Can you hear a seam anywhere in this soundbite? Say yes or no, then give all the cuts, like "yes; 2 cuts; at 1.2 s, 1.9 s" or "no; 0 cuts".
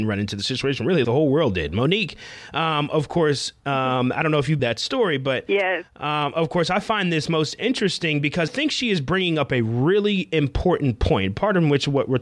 yes; 3 cuts; at 1.0 s, 4.6 s, 8.5 s